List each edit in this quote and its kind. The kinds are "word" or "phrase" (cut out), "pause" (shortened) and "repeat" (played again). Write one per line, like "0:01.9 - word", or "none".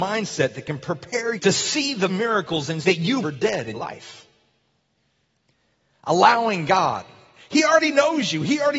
0:01.4 - word
0:02.1 - word
0:02.8 - word
0:03.2 - word
0:03.7 - word

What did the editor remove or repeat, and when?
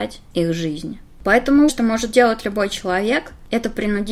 0:01.7 - word

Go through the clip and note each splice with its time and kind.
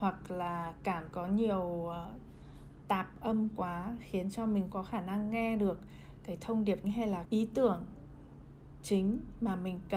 0:01.1 - word
0:02.8 - word
0:04.7 - word
0:06.8 - word
0:07.2 - word

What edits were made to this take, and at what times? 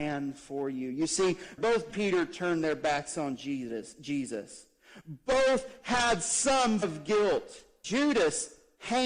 0:01.9 - phrase
0:06.8 - word

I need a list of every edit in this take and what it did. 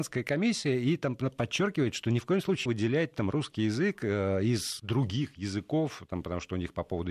0:02.7 - word
0:04.8 - word

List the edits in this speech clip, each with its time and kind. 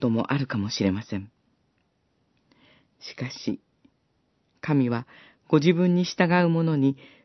none

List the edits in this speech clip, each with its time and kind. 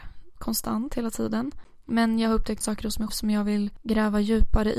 0:02.6 - word
0:03.1 - word

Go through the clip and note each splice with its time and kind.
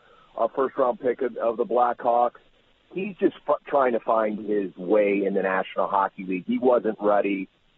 none

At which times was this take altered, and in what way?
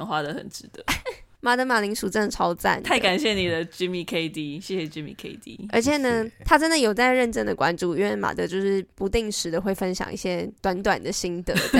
0:10.6 - pause

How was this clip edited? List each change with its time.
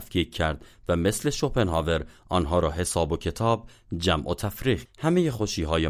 0:04.8 - word

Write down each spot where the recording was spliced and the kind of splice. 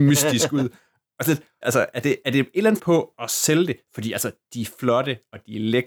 0:01.6 - word
0:02.8 - word
0:03.1 - word

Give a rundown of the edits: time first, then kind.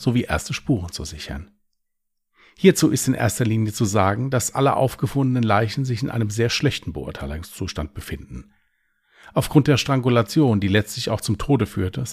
none

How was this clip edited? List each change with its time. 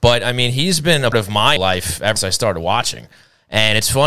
0:01.1 - word
0:01.6 - word
0:02.2 - word

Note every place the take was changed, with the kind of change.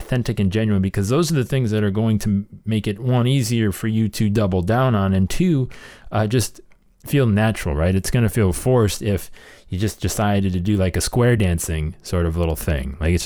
none

